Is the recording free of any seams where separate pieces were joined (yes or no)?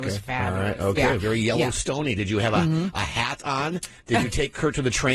yes